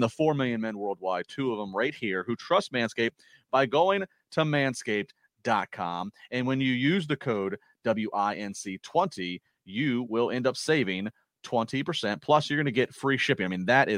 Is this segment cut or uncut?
uncut